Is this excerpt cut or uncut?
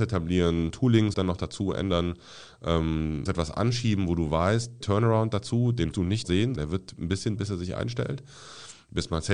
cut